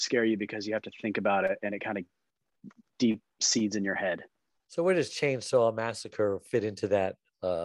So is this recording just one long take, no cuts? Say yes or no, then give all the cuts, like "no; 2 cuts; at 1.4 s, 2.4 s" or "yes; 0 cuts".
yes; 0 cuts